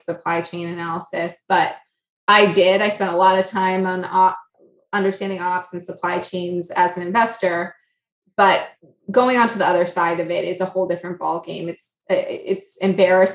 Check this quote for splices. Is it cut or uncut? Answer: uncut